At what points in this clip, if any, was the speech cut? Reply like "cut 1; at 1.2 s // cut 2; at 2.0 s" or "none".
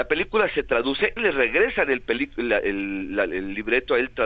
cut 1; at 1.2 s